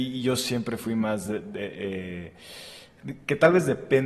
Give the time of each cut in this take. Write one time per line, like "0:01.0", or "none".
none